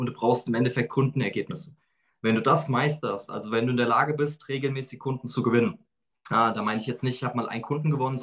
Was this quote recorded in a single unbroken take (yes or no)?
yes